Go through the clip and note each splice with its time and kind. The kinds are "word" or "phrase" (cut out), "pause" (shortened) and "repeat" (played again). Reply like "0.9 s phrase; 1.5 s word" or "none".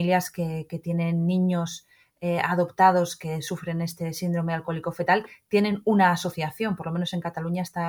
none